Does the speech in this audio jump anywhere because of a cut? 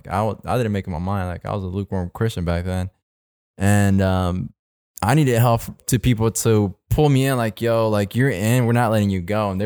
no; 0 cuts

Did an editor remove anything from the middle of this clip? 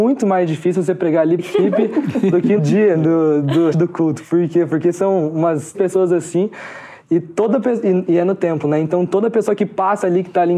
yes; 5 cuts; at 1.4 s, 2.6 s, 2.9 s, 3.7 s, 5.7 s

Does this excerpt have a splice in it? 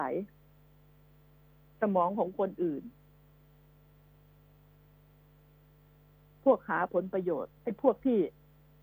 yes; 1 cut; at 7.6 s

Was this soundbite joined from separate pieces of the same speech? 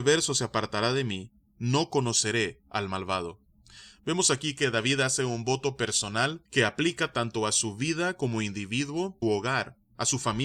yes; 2 cuts; at 6.5 s, 9.2 s

